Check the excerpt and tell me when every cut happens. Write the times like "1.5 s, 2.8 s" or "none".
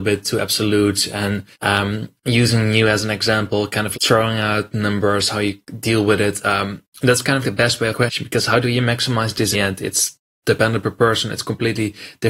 1.5 s, 3.9 s, 7.4 s, 7.9 s, 9.5 s